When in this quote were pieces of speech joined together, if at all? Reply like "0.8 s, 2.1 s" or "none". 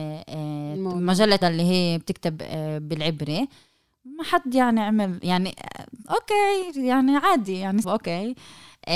1.4 s, 7.8 s